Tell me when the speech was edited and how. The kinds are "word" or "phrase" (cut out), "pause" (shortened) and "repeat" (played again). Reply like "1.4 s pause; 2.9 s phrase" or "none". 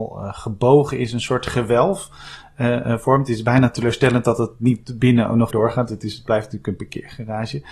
5.5 s word